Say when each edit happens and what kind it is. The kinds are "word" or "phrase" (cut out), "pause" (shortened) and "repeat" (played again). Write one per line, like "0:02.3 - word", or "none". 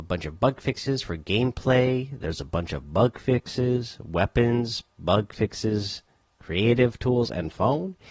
none